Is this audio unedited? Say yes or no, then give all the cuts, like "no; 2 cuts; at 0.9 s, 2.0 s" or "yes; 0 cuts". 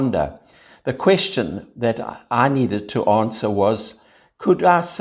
yes; 0 cuts